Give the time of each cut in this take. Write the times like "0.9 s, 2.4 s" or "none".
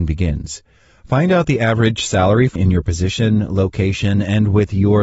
2.6 s